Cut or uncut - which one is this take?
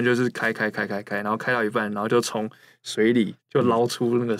cut